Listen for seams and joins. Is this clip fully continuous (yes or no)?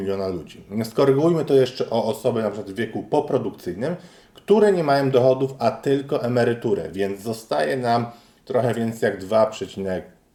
yes